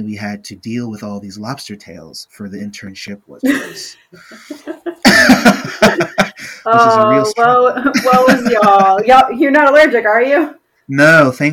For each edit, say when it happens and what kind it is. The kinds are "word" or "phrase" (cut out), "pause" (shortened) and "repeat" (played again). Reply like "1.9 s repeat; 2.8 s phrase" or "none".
none

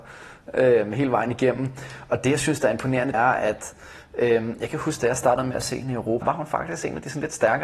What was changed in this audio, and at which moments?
3.1 s word; 6.2 s word

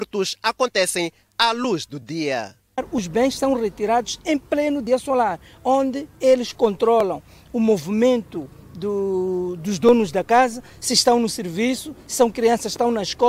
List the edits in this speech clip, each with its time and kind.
none

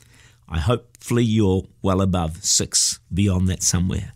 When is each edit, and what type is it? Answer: 3.0 s pause

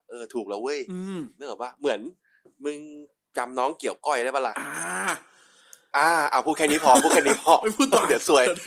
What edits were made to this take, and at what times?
none

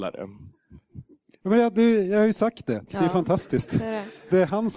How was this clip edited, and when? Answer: 2.9 s phrase

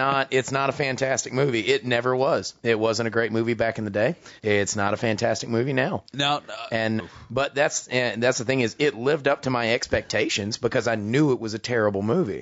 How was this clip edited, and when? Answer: 4.4 s pause; 7.0 s word

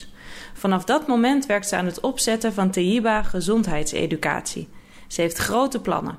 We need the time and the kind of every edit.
none

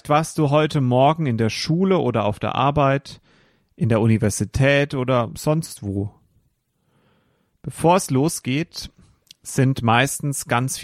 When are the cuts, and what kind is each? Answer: none

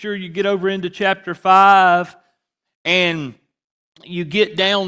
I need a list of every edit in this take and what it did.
none

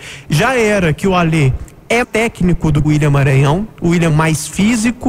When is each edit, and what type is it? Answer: 2.0 s word; 2.8 s word; 4.1 s word

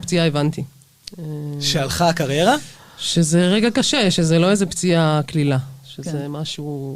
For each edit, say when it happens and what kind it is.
none

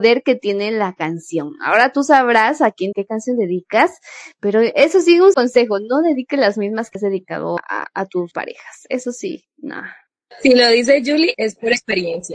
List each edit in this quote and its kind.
2.9 s word; 5.3 s word; 7.0 s word; 7.6 s word; 8.3 s word; 11.3 s word

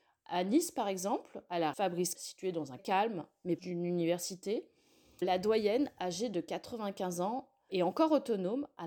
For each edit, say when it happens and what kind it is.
1.7 s word; 2.1 s word; 2.8 s phrase; 3.6 s word; 5.2 s word; 7.7 s word

